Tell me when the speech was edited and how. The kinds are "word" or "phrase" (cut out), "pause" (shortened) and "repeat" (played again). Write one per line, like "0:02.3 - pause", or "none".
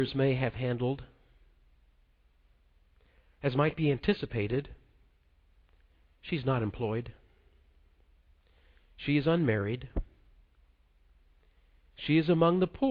none